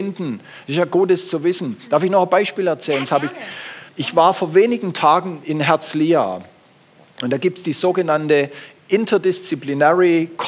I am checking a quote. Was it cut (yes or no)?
yes